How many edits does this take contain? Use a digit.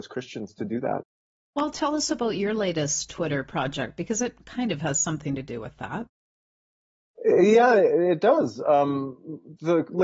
0